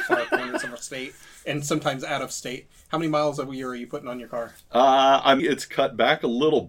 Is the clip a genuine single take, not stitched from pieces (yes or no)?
no